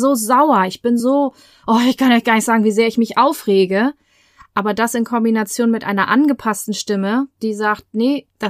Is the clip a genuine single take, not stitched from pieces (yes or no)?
yes